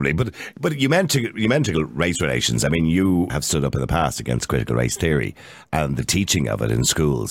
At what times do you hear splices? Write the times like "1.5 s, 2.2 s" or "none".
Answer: 3.3 s